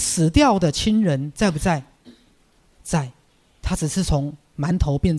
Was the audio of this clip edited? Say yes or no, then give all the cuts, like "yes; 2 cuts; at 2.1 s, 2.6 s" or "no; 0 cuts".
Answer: no; 0 cuts